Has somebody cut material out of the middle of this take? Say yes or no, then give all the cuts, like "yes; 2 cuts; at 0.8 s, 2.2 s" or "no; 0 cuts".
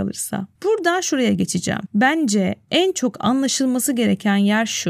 no; 0 cuts